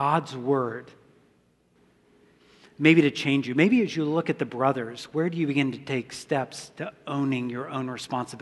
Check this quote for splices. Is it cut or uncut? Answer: uncut